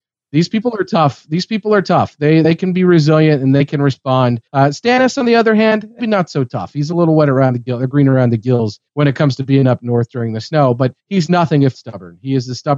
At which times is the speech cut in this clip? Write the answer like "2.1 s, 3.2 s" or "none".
4.5 s, 6.0 s, 8.9 s, 11.0 s, 11.7 s

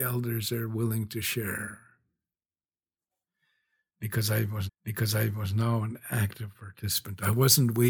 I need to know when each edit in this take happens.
4.7 s

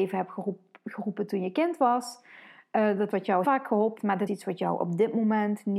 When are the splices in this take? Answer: 3.1 s, 3.4 s, 4.0 s, 4.3 s

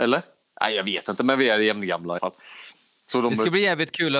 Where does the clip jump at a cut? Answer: 2.2 s

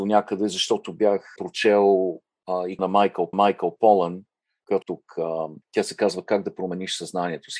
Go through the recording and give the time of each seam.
1.4 s, 2.8 s, 3.3 s, 4.8 s, 5.6 s

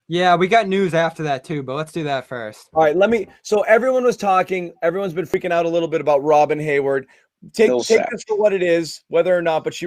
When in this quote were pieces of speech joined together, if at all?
none

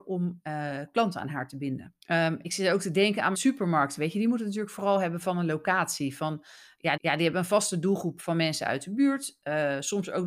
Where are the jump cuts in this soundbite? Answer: 2.0 s, 3.3 s, 7.0 s

